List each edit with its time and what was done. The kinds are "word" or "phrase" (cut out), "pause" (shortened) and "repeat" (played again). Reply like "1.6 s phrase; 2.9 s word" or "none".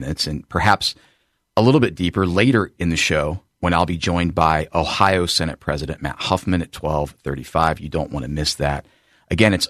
none